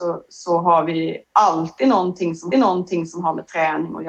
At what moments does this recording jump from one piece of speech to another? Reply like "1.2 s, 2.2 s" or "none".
1.2 s, 2.5 s